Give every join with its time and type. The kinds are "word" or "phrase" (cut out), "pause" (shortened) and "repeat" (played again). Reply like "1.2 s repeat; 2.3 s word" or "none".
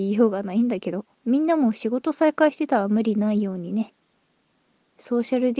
1.1 s pause